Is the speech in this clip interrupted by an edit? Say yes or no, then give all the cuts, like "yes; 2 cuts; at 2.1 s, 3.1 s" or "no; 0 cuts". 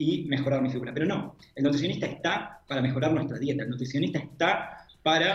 no; 0 cuts